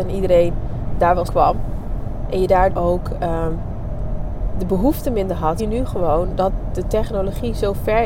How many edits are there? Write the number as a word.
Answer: three